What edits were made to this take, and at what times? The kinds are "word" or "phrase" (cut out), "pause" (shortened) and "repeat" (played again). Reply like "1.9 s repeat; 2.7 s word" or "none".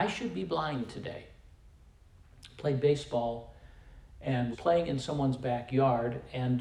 4.5 s word